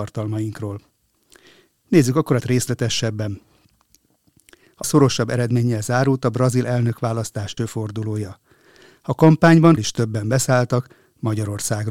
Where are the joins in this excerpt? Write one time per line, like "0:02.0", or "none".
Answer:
0:02.4
0:04.8
0:07.6
0:09.8